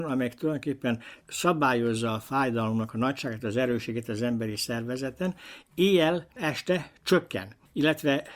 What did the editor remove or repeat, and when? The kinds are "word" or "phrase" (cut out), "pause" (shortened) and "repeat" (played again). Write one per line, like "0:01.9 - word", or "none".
none